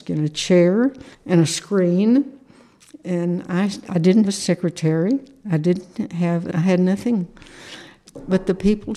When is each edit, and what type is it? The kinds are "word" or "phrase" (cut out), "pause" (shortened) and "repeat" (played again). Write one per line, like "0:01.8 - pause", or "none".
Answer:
0:01.1 - pause
0:04.2 - word
0:06.5 - word